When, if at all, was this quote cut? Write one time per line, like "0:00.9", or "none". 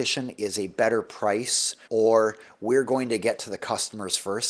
0:01.8